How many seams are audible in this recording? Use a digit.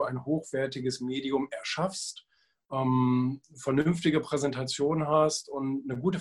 0